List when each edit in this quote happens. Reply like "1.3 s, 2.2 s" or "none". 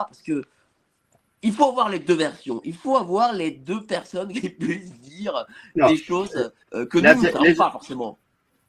6.6 s